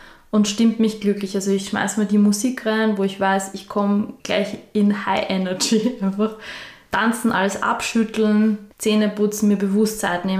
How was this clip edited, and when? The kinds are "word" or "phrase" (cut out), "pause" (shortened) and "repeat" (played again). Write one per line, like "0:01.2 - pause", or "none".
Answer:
0:04.2 - pause
0:08.7 - pause